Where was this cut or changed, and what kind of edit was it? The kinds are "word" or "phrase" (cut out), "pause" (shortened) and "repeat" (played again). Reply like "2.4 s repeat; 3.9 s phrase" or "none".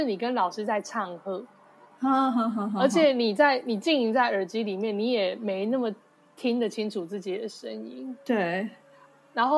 none